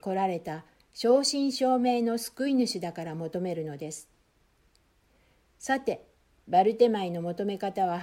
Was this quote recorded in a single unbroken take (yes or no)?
yes